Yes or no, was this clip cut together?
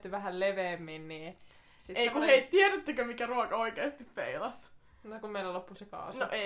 no